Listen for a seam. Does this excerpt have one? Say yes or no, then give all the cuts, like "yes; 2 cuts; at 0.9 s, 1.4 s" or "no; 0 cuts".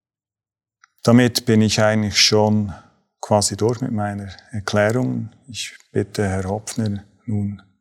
no; 0 cuts